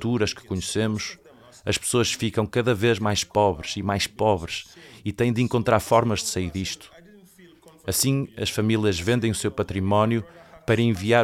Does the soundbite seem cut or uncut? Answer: uncut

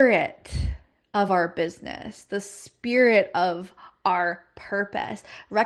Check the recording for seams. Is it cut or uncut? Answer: uncut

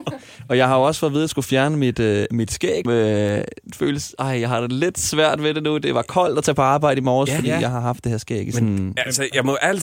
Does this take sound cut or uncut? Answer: cut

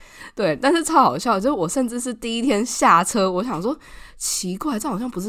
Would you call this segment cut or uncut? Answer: uncut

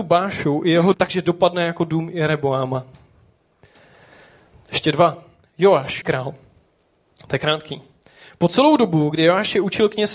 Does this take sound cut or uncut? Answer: cut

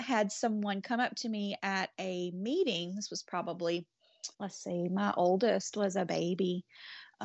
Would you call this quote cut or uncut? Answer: cut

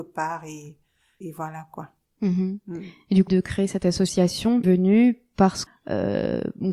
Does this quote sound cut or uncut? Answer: cut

